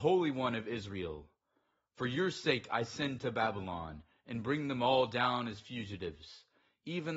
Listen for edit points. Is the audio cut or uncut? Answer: uncut